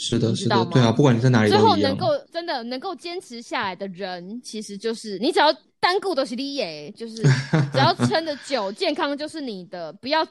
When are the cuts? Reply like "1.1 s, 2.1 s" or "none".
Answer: 2.3 s, 5.6 s